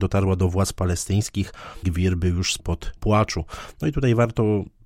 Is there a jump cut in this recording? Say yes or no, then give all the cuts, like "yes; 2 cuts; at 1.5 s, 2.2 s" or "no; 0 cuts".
yes; 3 cuts; at 1.8 s, 2.6 s, 3.0 s